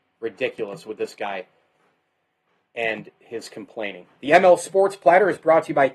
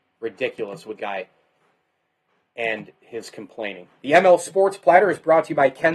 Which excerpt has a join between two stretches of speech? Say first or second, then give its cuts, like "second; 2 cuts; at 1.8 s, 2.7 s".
second; 1 cut; at 1.0 s